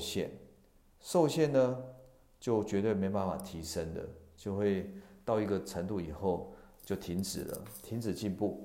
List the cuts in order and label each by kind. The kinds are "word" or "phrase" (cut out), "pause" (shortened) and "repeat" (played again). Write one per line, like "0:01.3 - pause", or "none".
none